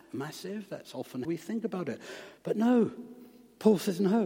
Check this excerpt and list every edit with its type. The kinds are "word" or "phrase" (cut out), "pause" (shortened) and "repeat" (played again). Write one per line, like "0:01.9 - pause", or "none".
0:01.2 - word
0:02.4 - pause